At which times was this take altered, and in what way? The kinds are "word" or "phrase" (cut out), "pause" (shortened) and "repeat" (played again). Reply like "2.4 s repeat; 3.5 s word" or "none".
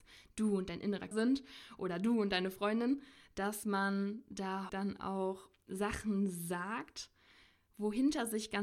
1.1 s word; 4.7 s word